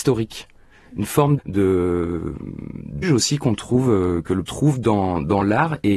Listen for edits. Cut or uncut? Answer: cut